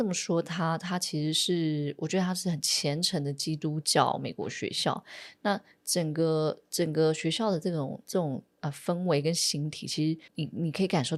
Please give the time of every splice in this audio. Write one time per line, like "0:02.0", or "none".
0:10.3